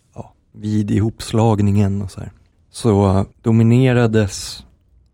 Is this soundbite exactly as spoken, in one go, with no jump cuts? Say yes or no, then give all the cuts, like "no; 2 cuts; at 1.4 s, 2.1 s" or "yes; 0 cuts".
no; 1 cut; at 3.3 s